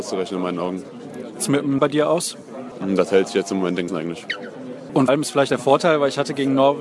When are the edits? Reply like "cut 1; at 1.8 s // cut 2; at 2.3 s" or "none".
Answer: cut 1; at 1.4 s // cut 2; at 1.8 s // cut 3; at 3.9 s // cut 4; at 5.1 s // cut 5; at 5.5 s